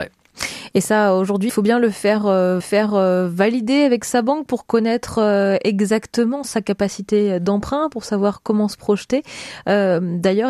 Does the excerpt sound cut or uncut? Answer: cut